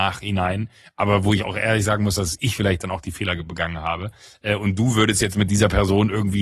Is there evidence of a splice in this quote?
no; 0 cuts

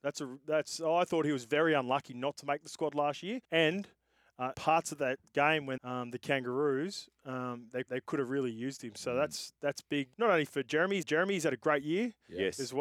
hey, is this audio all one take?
no; 7 cuts; at 3.4 s, 4.5 s, 5.8 s, 7.9 s, 10.1 s, 10.5 s, 11.0 s

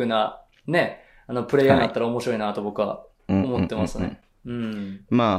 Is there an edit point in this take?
no; 0 cuts

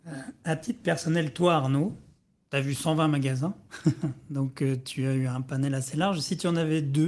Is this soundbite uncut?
yes; 0 cuts

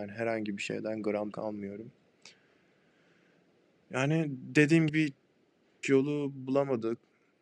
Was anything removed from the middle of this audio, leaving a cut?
yes; 3 cuts; at 1.3 s, 4.9 s, 5.8 s

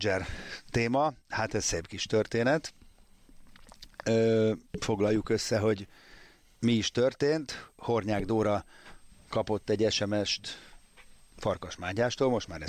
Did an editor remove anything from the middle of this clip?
no; 0 cuts

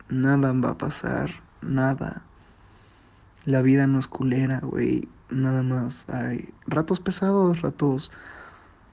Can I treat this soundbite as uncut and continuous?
no; 1 cut; at 6.6 s

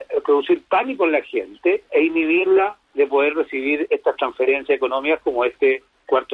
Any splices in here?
yes; 1 cut; at 2.8 s

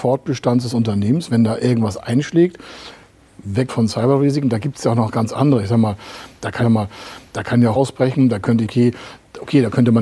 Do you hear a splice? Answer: yes; 4 cuts; at 3.7 s, 6.6 s, 7.8 s, 8.7 s

